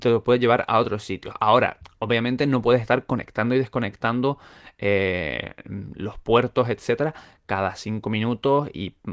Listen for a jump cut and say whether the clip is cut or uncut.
uncut